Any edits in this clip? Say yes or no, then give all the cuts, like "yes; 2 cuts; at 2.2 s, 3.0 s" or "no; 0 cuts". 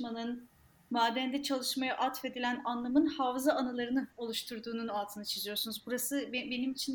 yes; 1 cut; at 4.1 s